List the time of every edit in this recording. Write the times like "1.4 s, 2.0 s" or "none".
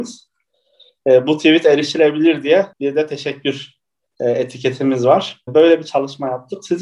2.7 s, 4.1 s